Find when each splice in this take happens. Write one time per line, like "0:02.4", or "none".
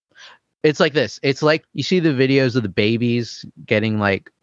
0:01.6